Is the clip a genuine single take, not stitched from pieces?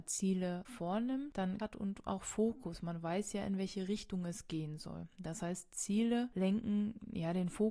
no; 1 cut; at 1.6 s

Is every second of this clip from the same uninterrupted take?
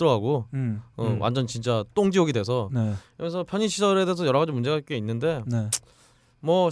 yes; 0 cuts

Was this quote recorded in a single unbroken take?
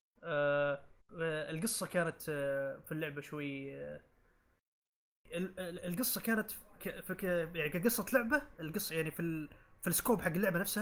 no; 1 cut; at 1.0 s

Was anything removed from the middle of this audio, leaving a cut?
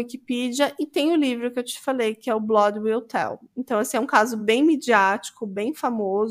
no; 0 cuts

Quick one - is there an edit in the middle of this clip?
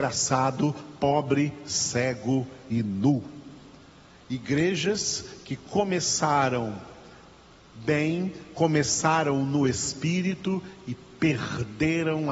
no; 0 cuts

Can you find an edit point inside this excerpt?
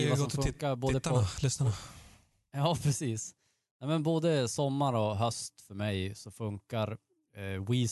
no; 0 cuts

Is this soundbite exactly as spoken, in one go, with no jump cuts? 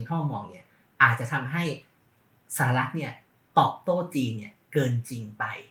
yes; 0 cuts

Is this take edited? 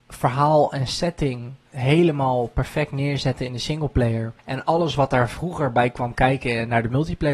yes; 2 cuts; at 1.6 s, 4.4 s

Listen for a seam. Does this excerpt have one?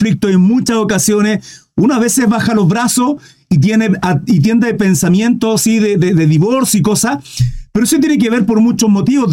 no; 0 cuts

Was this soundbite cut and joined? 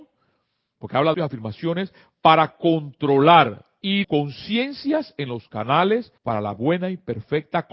yes; 3 cuts; at 1.1 s, 4.0 s, 6.2 s

